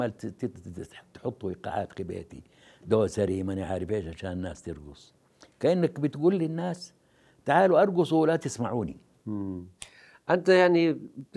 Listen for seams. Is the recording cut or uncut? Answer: uncut